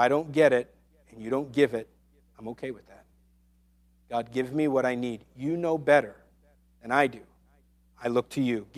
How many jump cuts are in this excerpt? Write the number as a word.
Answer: zero